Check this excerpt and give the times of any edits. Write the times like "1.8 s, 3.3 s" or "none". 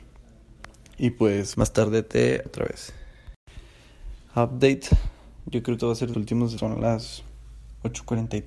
1.5 s, 2.5 s, 5.8 s, 6.1 s, 6.6 s